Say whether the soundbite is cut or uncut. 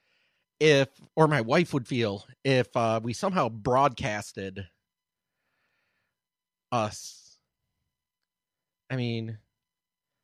uncut